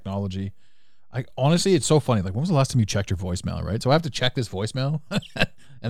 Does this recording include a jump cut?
no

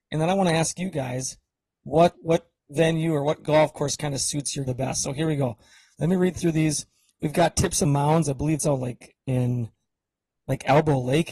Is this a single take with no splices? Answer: no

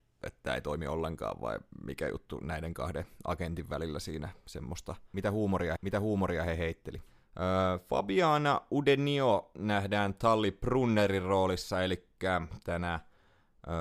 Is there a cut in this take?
yes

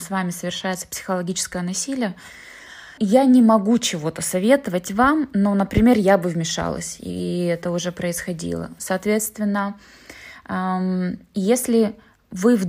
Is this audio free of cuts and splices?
no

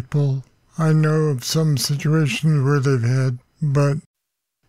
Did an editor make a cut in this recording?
yes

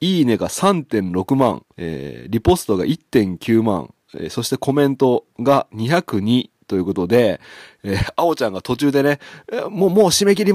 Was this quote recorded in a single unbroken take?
no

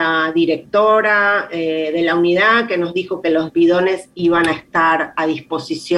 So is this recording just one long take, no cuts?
yes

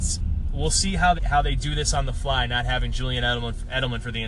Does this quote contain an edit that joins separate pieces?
yes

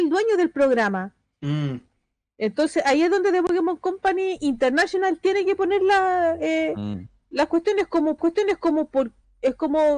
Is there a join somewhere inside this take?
yes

